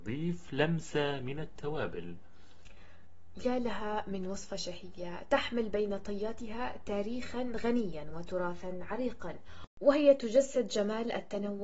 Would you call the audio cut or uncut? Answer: uncut